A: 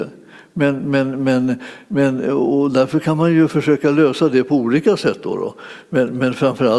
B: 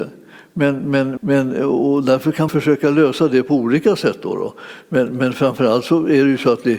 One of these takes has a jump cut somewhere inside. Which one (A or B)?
B